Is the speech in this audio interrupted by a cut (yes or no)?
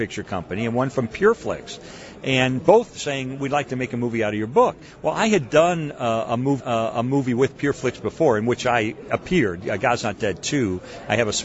yes